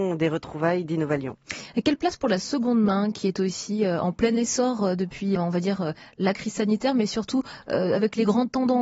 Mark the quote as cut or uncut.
cut